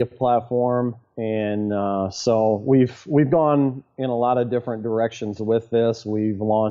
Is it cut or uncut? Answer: uncut